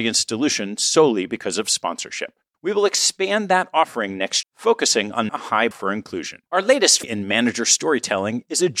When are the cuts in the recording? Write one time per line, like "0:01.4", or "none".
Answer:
0:02.5
0:04.4
0:05.3
0:05.7
0:06.5
0:07.0